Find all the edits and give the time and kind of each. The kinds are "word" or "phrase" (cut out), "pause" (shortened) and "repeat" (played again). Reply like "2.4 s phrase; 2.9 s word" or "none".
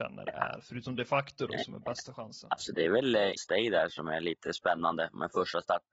3.4 s word

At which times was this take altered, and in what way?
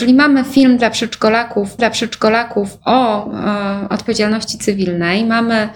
1.8 s repeat

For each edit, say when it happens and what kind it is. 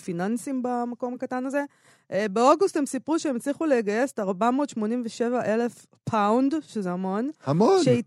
none

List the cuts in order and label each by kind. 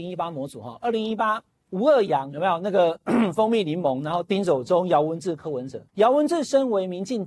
1.5 s pause; 5.9 s pause

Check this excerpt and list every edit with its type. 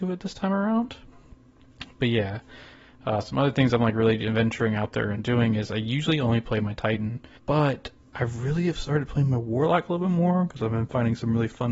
none

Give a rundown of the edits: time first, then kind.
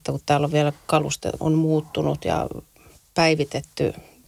1.4 s word

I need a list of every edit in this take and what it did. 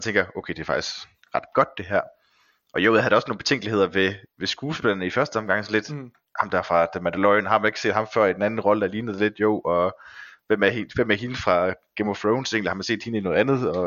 none

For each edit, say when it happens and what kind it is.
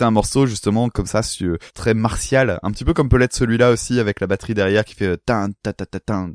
1.7 s pause

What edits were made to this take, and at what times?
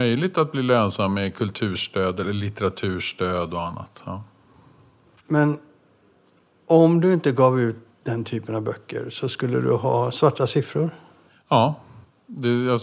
none

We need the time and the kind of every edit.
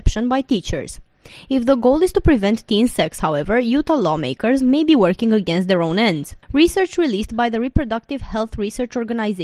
6.4 s pause

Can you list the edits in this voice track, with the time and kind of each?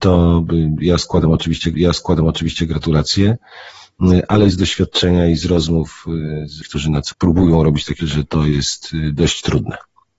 1.7 s repeat; 4.5 s word; 6.6 s word; 7.1 s word; 8.0 s word

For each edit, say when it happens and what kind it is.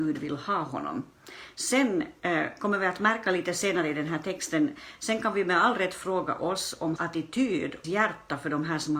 7.0 s word; 7.8 s phrase

